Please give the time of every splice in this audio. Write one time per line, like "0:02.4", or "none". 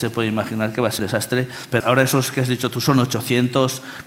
0:01.0
0:01.8